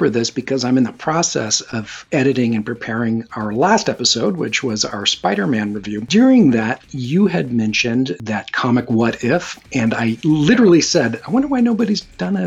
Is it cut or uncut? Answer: uncut